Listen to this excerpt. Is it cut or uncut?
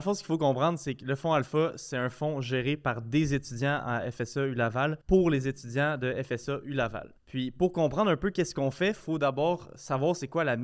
cut